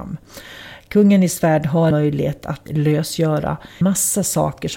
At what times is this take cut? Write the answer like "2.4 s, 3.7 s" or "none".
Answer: 1.9 s, 2.7 s, 3.8 s

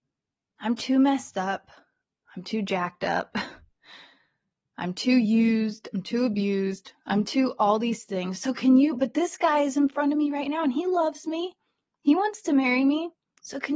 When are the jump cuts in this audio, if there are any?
none

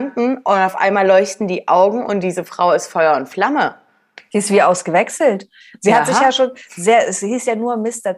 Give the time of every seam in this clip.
none

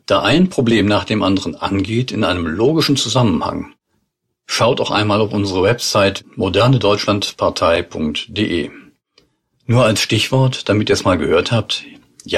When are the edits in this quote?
none

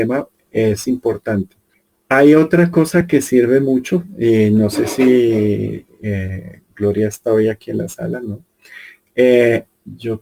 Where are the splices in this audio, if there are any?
1.7 s, 6.7 s

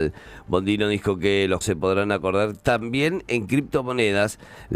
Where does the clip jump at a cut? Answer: 1.6 s

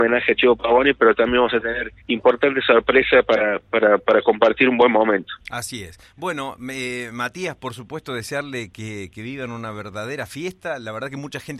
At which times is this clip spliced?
2.0 s, 5.4 s

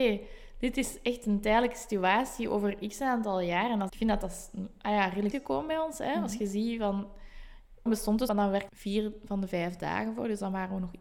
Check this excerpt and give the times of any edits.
3.9 s, 5.3 s, 7.9 s, 8.3 s, 8.7 s

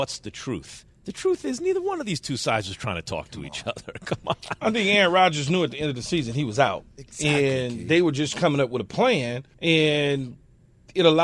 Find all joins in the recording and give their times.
9.5 s

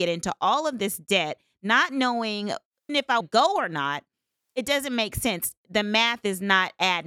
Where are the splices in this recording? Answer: 2.9 s, 3.2 s

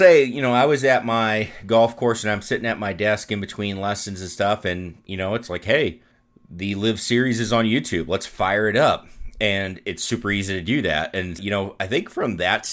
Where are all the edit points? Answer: 6.1 s, 11.4 s

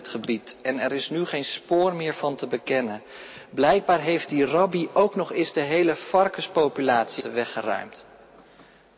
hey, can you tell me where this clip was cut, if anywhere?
7.2 s

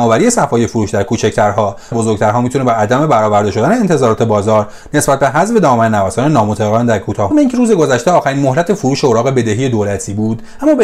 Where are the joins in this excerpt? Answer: 1.9 s, 7.3 s

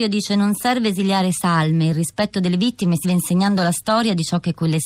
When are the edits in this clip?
3.0 s

